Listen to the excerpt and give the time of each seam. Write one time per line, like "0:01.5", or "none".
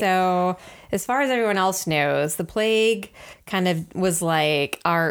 none